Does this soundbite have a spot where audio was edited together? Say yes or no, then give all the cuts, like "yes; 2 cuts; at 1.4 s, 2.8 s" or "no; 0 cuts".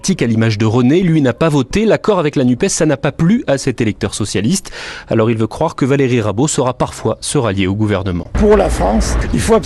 no; 0 cuts